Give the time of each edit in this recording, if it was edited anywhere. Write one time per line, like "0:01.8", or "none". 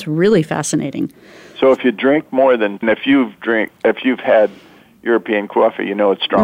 0:02.8